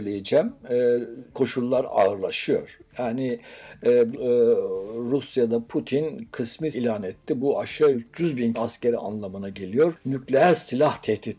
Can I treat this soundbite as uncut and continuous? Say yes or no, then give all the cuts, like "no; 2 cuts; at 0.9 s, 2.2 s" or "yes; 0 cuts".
no; 6 cuts; at 1.3 s, 4.1 s, 6.7 s, 7.9 s, 8.5 s, 9.0 s